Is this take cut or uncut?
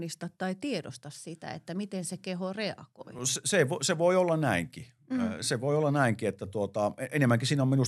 uncut